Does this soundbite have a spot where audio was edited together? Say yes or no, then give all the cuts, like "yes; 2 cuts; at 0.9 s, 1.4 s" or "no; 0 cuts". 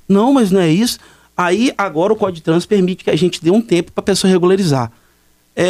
no; 0 cuts